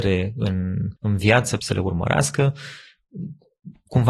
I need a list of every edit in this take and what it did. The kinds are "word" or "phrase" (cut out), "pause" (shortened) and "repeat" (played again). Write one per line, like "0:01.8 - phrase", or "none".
0:01.0 - pause
0:01.6 - phrase